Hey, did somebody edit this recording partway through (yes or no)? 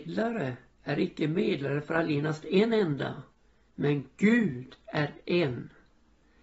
no